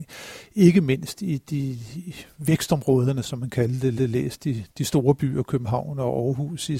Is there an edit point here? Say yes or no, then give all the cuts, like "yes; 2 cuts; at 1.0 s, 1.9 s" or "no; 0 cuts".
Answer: yes; 1 cut; at 4.0 s